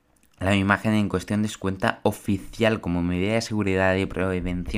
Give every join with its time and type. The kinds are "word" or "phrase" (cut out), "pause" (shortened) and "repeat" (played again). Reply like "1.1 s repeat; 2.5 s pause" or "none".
none